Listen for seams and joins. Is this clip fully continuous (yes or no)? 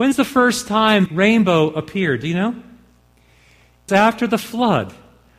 no